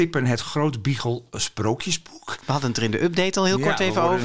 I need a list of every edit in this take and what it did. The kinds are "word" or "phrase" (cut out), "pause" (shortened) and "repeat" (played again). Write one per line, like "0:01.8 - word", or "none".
none